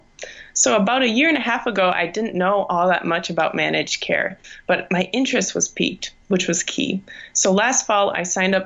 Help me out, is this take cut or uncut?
cut